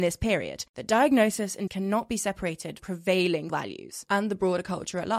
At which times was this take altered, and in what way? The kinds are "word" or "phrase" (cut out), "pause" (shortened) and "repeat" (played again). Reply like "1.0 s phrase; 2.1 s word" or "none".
1.7 s word; 2.8 s word; 3.5 s word